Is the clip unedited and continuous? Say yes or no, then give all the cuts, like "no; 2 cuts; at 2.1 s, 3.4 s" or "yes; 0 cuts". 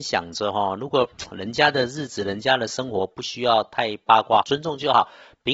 no; 1 cut; at 4.4 s